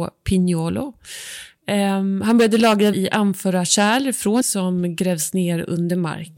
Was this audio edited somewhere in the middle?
yes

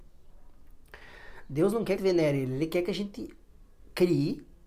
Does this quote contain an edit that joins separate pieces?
yes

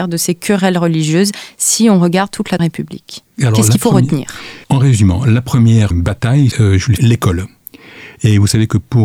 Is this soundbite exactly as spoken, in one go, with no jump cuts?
no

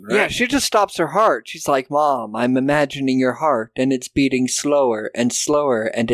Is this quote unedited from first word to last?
yes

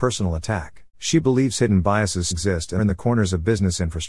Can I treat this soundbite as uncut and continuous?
no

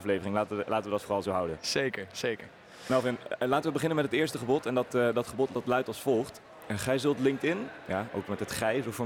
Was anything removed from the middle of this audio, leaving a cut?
no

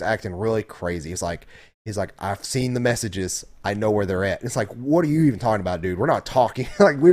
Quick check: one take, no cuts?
yes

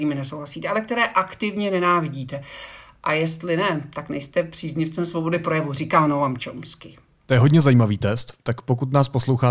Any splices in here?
no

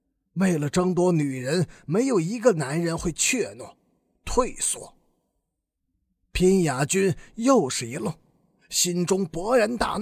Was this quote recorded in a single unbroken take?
yes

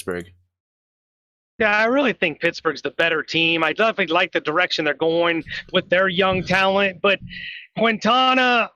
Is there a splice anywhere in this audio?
no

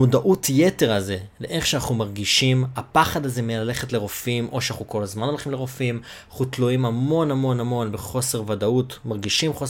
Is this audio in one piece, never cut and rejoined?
yes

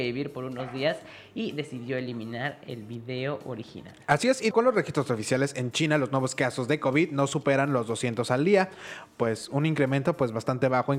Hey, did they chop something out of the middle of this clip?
yes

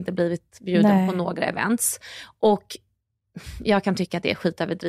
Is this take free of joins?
yes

